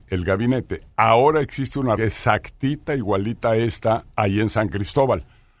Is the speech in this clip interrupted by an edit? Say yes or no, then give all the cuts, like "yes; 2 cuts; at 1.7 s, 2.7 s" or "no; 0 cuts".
yes; 1 cut; at 2.0 s